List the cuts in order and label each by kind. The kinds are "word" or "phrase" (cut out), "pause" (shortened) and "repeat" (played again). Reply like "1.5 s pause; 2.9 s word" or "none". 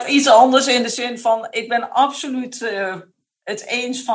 none